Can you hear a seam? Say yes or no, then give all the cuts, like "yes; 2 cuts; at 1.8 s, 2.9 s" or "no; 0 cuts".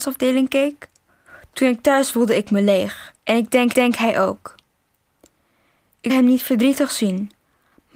yes; 5 cuts; at 1.1 s, 2.1 s, 3.2 s, 3.7 s, 6.1 s